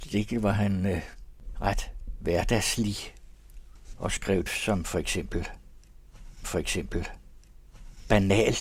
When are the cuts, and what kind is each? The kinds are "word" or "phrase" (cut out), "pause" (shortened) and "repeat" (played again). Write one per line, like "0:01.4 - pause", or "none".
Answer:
0:04.5 - word
0:06.4 - repeat